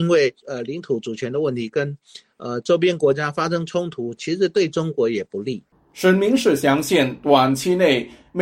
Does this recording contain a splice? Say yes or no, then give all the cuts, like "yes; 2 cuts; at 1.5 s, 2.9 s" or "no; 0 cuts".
no; 0 cuts